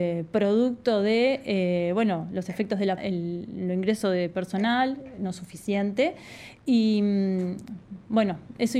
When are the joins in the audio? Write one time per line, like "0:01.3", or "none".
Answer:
0:03.0